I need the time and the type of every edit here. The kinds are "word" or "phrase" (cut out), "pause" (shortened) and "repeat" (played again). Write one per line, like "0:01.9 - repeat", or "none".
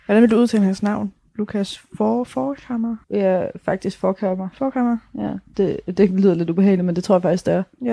0:03.0 - pause